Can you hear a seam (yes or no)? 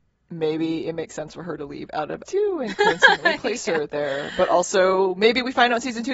yes